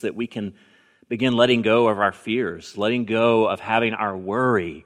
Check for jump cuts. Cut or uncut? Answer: uncut